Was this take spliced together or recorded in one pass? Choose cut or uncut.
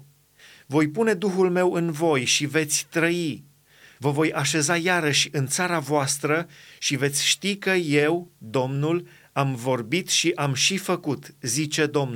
uncut